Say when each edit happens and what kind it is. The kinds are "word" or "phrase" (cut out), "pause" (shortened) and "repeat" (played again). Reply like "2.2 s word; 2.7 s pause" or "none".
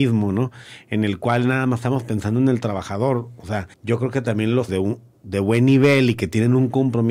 3.7 s pause; 4.7 s word